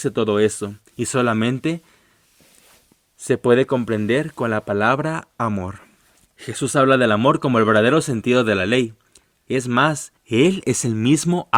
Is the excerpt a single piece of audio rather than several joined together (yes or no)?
no